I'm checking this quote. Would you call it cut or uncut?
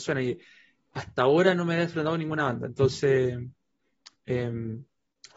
uncut